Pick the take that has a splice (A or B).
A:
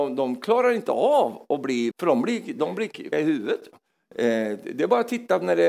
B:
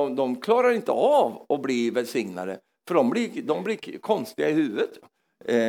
A